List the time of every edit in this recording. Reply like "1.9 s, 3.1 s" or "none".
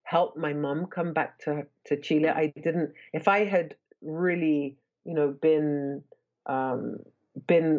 none